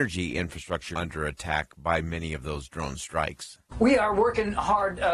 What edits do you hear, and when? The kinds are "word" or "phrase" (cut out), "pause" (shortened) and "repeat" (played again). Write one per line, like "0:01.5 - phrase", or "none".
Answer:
0:00.9 - word
0:03.7 - pause